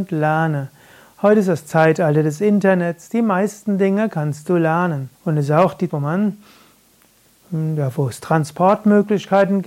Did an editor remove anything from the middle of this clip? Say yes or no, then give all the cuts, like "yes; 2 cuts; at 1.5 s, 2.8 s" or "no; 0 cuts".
yes; 2 cuts; at 5.1 s, 5.9 s